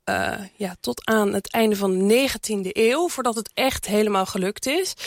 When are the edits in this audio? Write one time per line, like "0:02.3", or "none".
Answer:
none